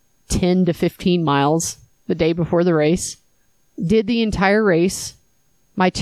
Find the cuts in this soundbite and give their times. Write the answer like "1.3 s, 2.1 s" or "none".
none

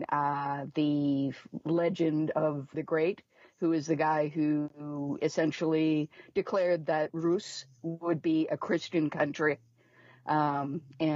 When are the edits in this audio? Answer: 2.7 s

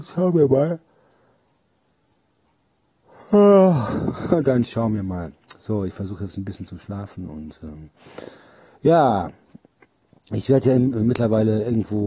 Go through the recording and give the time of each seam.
none

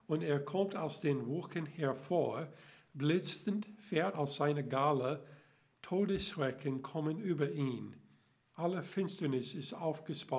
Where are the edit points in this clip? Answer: 4.1 s

